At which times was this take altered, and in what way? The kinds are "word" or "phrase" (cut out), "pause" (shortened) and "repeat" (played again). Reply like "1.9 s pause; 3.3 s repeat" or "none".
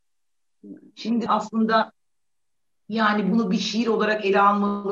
1.3 s word